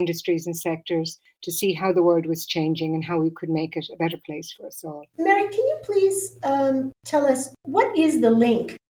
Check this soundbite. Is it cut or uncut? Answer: cut